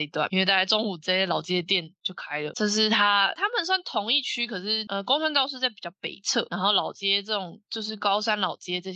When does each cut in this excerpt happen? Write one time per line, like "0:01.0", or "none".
0:03.4